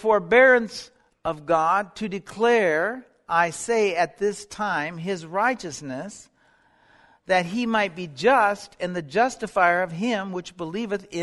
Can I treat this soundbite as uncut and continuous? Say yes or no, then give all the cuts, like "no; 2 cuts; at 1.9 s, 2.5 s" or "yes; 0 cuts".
yes; 0 cuts